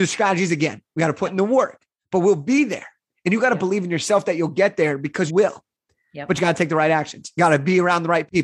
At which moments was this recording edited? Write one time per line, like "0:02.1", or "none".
0:05.3